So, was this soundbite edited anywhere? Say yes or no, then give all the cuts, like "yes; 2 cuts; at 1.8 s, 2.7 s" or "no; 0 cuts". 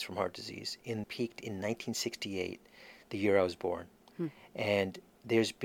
yes; 2 cuts; at 1.0 s, 4.0 s